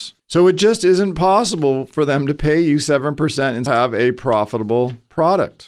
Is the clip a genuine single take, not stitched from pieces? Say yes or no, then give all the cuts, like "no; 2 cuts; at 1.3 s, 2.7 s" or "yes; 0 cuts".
no; 1 cut; at 3.7 s